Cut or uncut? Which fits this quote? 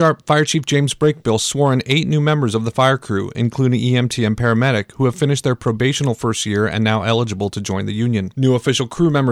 uncut